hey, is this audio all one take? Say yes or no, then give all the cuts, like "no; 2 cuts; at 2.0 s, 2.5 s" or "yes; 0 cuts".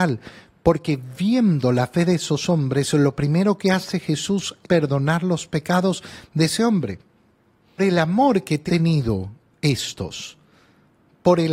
no; 3 cuts; at 4.6 s, 7.8 s, 8.7 s